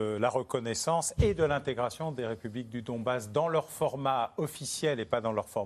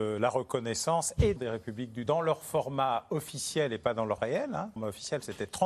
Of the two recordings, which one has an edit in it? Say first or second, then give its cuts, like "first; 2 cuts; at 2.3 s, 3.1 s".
second; 4 cuts; at 1.4 s, 2.1 s, 4.2 s, 4.8 s